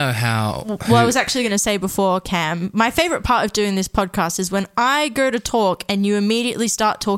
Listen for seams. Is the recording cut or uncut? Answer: uncut